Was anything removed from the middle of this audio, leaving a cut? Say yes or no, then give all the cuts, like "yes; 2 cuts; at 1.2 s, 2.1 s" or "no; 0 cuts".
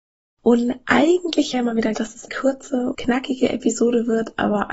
yes; 4 cuts; at 1.5 s, 1.9 s, 2.3 s, 2.9 s